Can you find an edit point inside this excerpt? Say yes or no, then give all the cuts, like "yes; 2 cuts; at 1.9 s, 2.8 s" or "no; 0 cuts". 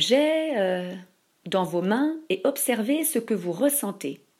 no; 0 cuts